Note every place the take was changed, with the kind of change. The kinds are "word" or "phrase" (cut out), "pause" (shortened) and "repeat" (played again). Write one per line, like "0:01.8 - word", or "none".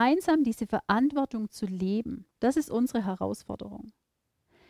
0:02.3 - pause